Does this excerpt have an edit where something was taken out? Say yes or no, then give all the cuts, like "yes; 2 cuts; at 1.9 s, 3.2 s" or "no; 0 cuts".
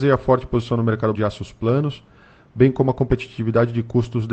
yes; 1 cut; at 1.1 s